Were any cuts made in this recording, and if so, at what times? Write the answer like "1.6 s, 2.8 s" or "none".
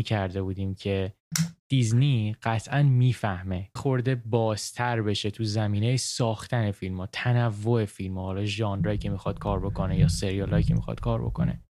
3.8 s

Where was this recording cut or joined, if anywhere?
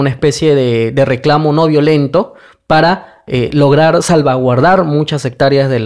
none

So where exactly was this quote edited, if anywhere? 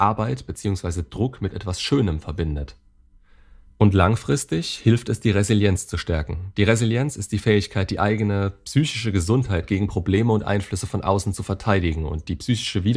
none

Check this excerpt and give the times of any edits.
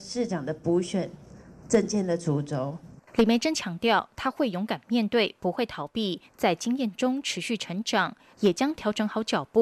3.1 s

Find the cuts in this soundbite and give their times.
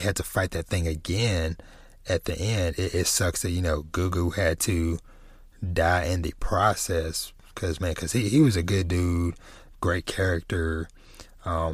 none

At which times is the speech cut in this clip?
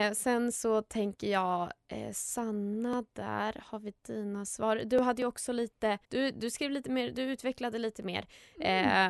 6.0 s

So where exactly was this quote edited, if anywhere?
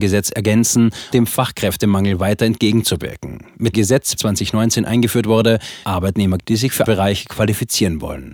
1.1 s, 3.7 s, 4.2 s, 5.8 s, 6.4 s, 6.9 s

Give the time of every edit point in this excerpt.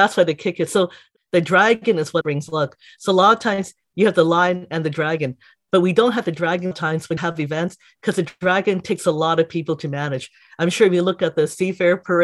2.2 s, 6.7 s, 7.2 s

